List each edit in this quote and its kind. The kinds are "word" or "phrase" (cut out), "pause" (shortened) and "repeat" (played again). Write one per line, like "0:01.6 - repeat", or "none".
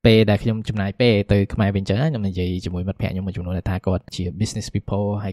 none